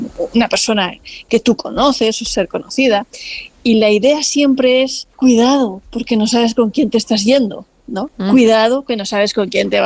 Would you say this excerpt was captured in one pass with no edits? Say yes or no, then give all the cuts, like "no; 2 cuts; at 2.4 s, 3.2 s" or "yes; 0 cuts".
no; 2 cuts; at 5.1 s, 8.1 s